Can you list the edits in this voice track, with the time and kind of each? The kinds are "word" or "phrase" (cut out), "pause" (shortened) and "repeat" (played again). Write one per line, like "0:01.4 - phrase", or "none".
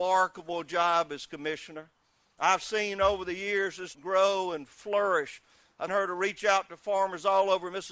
0:03.9 - word
0:05.9 - word